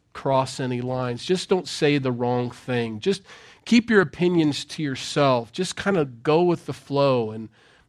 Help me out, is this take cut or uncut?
uncut